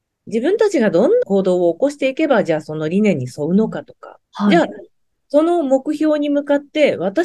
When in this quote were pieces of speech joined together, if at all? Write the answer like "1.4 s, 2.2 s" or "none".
1.2 s, 4.2 s